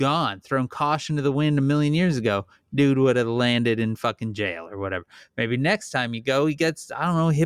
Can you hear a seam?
no; 0 cuts

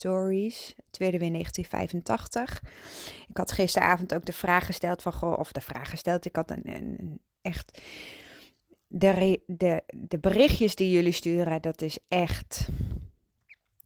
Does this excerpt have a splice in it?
no; 0 cuts

